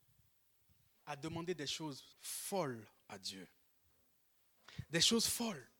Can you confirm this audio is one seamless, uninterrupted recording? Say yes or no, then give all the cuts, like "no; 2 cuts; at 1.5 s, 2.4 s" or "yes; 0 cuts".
no; 1 cut; at 2.1 s